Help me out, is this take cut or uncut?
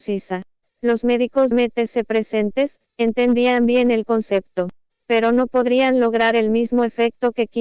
cut